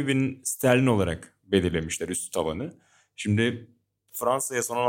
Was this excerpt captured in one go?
yes; 0 cuts

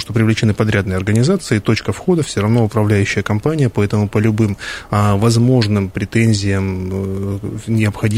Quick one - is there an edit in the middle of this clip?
no; 0 cuts

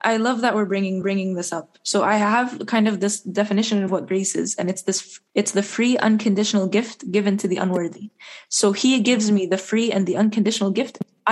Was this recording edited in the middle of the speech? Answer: yes; 3 cuts; at 1.0 s, 3.9 s, 5.3 s

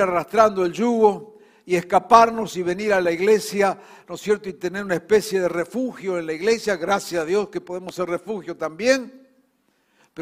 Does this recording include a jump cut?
no; 0 cuts

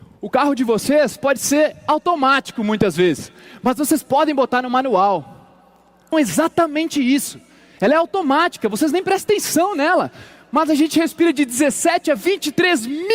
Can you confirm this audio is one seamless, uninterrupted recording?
no; 1 cut; at 6.1 s

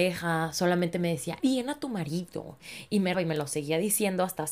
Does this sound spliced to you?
yes; 2 cuts; at 1.4 s, 3.1 s

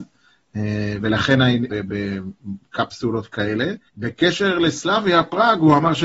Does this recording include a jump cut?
yes; 2 cuts; at 1.7 s, 3.9 s

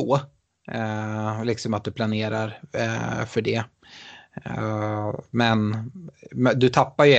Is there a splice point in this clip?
no; 0 cuts

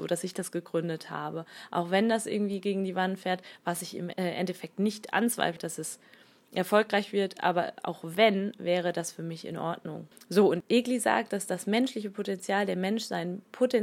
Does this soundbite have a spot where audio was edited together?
no; 0 cuts

